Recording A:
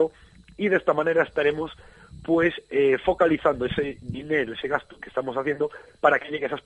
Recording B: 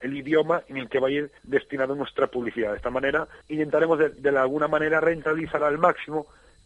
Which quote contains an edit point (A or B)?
B